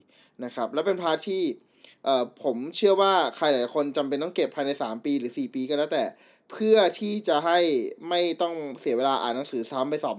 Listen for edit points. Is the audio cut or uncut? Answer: uncut